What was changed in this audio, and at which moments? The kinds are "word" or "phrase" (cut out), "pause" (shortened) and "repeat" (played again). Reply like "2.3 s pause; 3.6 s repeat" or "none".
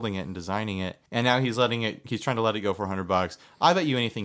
1.1 s pause